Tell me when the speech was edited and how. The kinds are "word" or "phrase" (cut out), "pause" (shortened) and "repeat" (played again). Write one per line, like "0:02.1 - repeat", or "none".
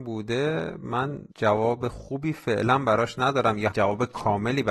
0:01.3 - pause
0:03.7 - word

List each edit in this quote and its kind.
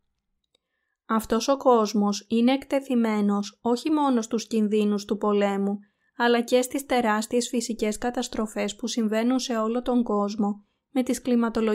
none

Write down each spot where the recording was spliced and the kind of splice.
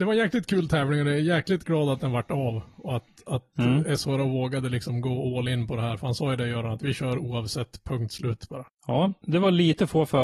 none

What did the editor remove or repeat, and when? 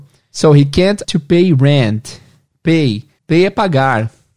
0:01.0 - word
0:03.2 - pause

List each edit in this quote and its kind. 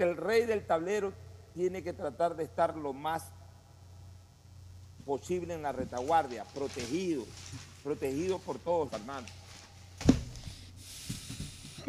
0:08.9 - phrase

